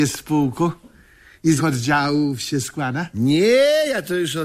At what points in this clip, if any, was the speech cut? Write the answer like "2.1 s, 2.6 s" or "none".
1.6 s